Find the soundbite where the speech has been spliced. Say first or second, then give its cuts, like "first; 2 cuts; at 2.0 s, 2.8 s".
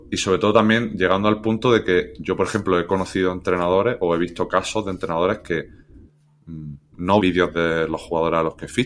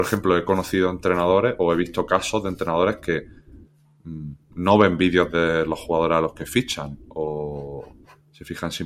first; 1 cut; at 7.2 s